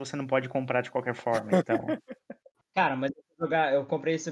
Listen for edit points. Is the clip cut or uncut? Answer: uncut